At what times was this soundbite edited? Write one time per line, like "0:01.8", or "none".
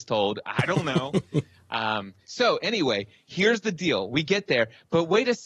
none